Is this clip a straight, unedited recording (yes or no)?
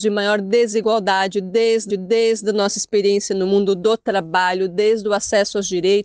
no